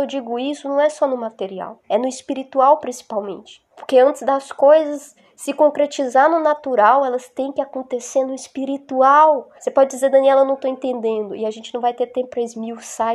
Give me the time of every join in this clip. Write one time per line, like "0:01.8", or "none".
0:01.8
0:03.7
0:09.6